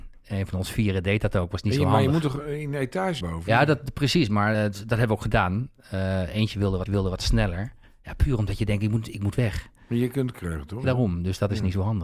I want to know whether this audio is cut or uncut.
cut